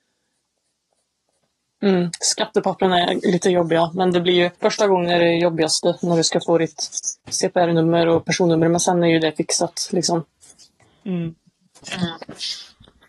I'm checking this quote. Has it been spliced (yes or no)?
yes